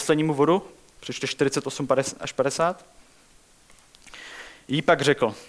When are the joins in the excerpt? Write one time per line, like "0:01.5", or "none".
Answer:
0:01.2